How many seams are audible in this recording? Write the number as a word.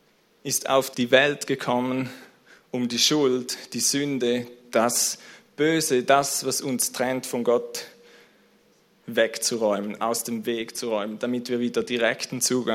one